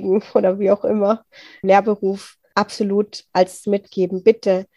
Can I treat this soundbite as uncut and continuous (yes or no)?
no